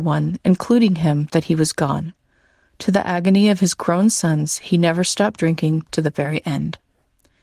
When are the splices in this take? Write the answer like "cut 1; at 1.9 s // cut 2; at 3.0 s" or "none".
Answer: none